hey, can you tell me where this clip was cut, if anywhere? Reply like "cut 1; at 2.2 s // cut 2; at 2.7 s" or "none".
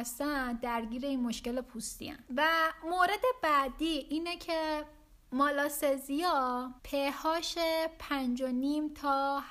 cut 1; at 2.3 s // cut 2; at 6.8 s